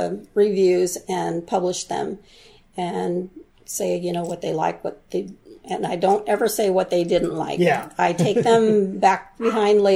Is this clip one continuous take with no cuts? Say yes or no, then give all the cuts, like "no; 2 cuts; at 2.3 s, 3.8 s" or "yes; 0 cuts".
yes; 0 cuts